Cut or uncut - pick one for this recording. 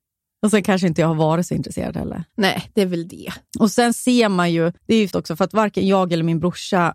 cut